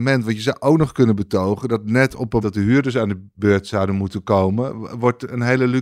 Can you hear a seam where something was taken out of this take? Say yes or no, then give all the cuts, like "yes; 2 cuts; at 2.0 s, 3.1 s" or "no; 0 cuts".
yes; 1 cut; at 2.4 s